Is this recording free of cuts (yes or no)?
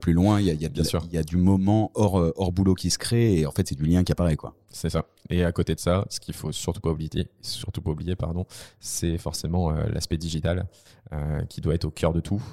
yes